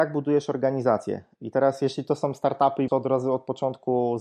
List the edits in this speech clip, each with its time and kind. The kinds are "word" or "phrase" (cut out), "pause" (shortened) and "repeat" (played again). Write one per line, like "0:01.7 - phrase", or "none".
0:02.9 - word